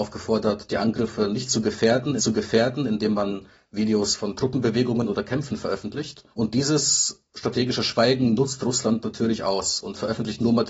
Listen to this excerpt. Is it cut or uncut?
cut